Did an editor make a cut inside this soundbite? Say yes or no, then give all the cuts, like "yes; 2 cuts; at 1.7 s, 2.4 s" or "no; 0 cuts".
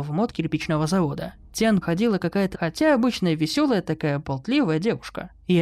yes; 2 cuts; at 1.8 s, 2.5 s